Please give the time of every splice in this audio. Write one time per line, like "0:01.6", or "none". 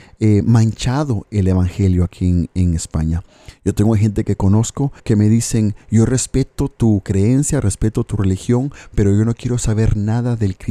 0:05.0